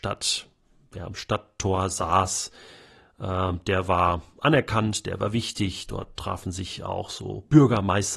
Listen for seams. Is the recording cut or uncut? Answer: uncut